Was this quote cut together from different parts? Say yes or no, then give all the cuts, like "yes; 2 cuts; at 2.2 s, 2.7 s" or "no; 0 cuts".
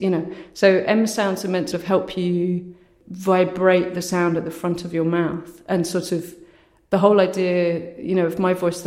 yes; 1 cut; at 1.7 s